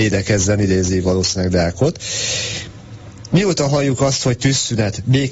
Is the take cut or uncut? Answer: uncut